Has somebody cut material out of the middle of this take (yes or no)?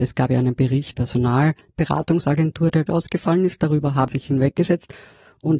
yes